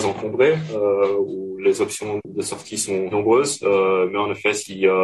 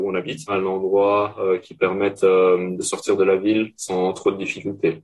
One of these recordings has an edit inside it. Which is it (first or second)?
first